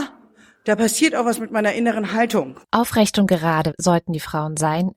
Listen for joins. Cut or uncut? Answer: cut